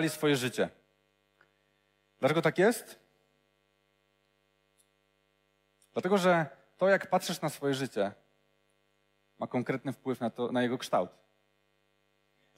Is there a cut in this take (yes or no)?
no